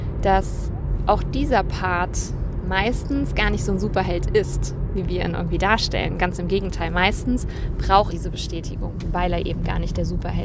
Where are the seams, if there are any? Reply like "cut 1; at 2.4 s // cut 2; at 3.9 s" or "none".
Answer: cut 1; at 8.1 s